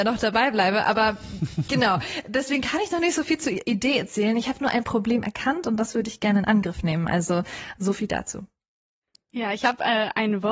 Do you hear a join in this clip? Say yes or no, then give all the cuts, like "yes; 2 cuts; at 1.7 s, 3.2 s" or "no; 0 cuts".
no; 0 cuts